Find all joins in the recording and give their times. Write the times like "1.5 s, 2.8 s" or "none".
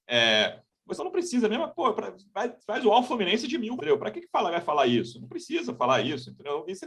1.0 s, 1.7 s, 3.8 s

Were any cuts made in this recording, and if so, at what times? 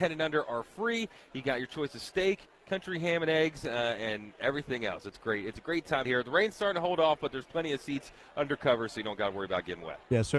6.0 s

